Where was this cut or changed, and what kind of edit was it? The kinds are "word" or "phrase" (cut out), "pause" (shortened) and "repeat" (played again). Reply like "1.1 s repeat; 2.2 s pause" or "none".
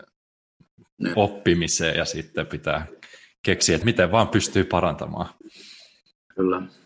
1.1 s word; 3.8 s word

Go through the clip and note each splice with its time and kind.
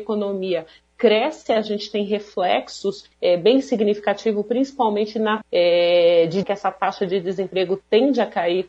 3.1 s pause; 5.4 s word; 6.4 s word

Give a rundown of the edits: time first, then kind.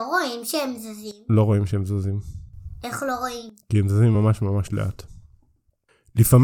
none

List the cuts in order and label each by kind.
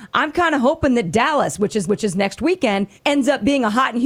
1.8 s repeat; 3.0 s pause

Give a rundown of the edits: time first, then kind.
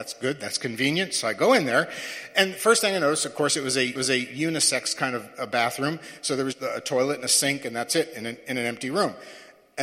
4.0 s repeat; 6.5 s word

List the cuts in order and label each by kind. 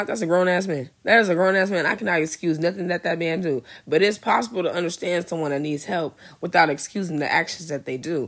0.9 s pause

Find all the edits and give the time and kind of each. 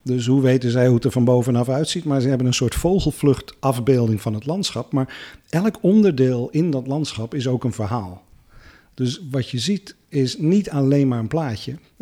none

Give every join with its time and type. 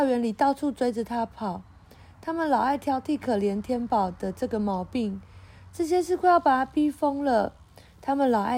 none

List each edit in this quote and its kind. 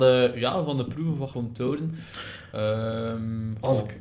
1.3 s word

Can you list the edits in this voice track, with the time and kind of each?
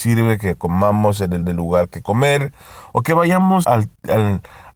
1.4 s repeat; 2.0 s word; 3.6 s word

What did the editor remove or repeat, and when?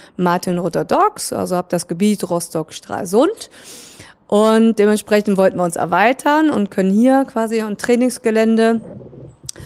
none

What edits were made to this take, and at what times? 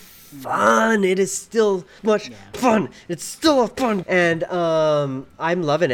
2.0 s word; 4.0 s word

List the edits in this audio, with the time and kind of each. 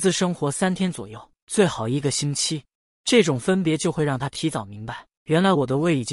none

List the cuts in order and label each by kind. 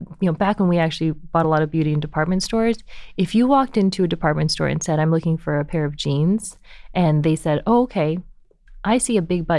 none

